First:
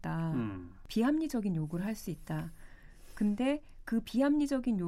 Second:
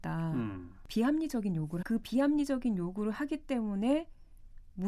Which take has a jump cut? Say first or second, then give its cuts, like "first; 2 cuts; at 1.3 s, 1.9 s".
second; 1 cut; at 1.8 s